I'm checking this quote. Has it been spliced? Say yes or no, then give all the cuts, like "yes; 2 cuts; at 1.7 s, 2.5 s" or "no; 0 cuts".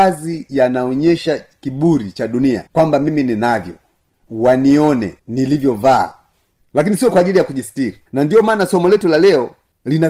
yes; 3 cuts; at 2.7 s, 5.2 s, 8.1 s